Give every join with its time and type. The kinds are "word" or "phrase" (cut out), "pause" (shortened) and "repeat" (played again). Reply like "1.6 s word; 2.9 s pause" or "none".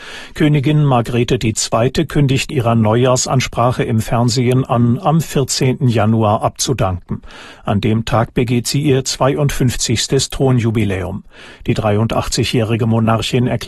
2.5 s word